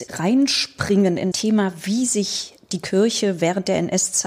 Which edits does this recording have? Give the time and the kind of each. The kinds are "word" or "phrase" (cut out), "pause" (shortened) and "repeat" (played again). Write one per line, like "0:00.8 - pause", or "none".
0:01.3 - word